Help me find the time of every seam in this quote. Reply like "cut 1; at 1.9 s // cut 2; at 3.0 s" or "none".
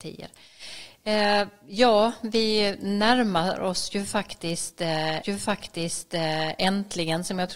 cut 1; at 5.2 s